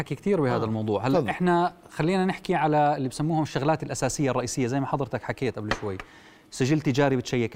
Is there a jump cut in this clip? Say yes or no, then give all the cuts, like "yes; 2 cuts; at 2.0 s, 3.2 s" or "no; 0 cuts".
no; 0 cuts